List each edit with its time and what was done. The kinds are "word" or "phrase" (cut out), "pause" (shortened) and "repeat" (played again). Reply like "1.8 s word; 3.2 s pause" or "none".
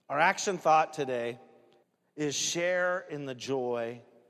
1.8 s pause